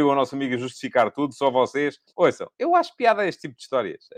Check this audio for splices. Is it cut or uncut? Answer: cut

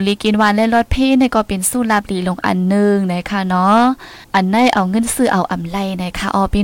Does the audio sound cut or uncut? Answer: cut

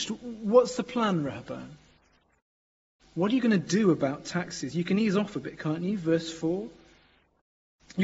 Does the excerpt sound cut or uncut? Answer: uncut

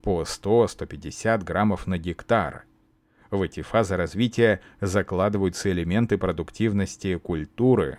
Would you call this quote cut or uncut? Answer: uncut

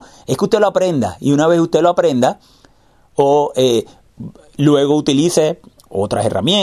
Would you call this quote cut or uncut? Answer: uncut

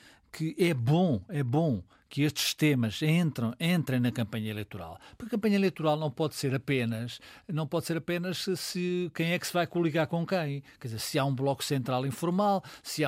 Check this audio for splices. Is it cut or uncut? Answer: uncut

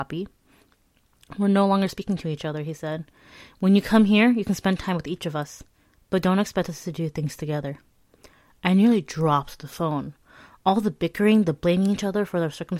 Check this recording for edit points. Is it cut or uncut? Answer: uncut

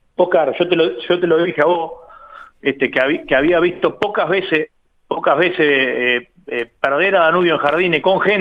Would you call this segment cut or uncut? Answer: uncut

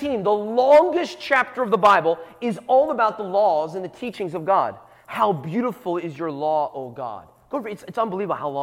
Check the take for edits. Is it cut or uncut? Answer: uncut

